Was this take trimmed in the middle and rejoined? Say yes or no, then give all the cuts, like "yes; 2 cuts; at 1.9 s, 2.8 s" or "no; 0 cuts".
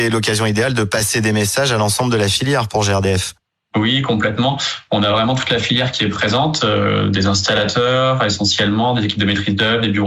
no; 0 cuts